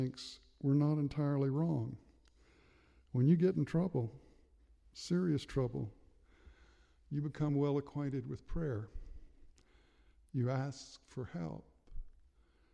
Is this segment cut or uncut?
uncut